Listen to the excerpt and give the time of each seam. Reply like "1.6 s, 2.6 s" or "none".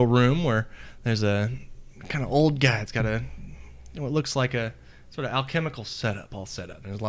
none